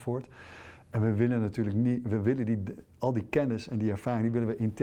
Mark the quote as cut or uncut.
uncut